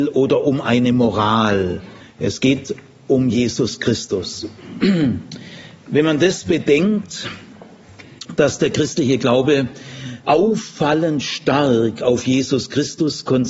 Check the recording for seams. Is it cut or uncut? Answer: cut